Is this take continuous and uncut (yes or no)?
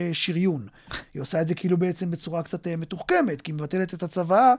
yes